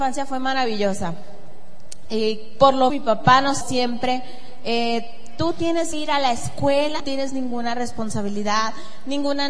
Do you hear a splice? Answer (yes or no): yes